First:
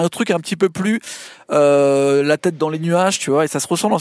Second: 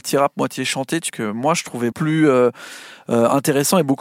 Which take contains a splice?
second; 2 cuts; at 1.1 s, 1.9 s

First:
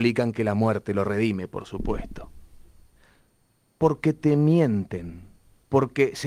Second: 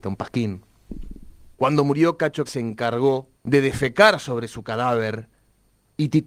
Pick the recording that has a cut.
second; 3 cuts; at 1.5 s, 2.5 s, 3.4 s

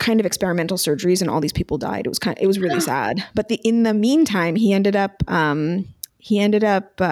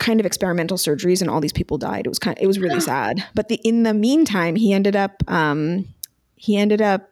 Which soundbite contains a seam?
first; 1 cut; at 6.1 s

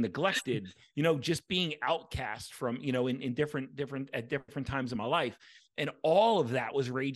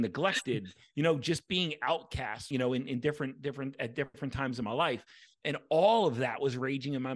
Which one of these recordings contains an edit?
second; 1 cut; at 2.5 s

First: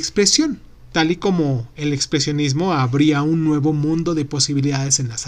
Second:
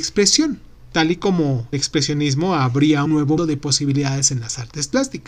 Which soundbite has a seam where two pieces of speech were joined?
second; 3 cuts; at 1.7 s, 3.1 s, 3.4 s

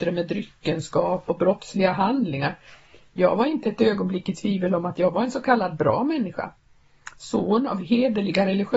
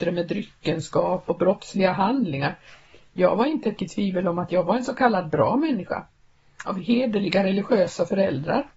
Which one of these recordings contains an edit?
second; 2 cuts; at 3.8 s, 6.7 s

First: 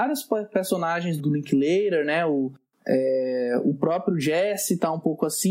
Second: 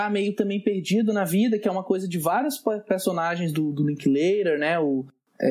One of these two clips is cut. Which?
first; 1 cut; at 1.2 s

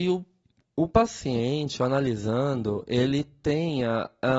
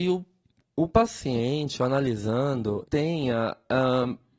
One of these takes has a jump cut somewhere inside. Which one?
second; 1 cut; at 2.8 s

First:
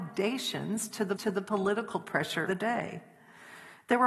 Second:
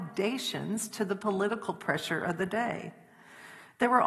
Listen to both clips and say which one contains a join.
first; 2 cuts; at 1.2 s, 2.5 s

